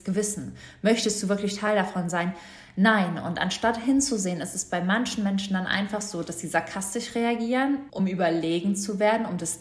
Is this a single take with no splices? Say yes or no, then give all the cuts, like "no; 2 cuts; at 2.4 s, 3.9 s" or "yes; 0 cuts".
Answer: yes; 0 cuts